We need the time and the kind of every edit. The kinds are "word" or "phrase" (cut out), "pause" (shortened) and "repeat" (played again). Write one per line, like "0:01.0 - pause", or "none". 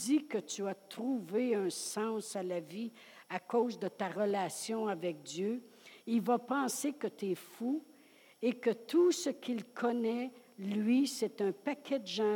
none